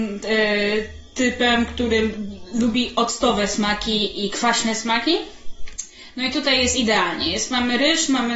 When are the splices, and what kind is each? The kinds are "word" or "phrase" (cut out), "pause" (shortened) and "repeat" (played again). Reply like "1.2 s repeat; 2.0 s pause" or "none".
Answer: none